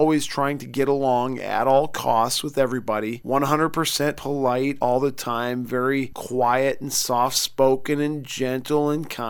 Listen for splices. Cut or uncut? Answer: uncut